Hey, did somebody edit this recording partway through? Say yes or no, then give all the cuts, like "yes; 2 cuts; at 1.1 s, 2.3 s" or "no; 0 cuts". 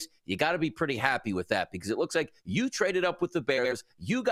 no; 0 cuts